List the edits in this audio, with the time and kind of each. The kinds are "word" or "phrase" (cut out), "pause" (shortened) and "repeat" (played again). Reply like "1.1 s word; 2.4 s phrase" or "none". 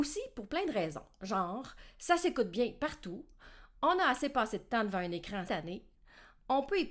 5.5 s word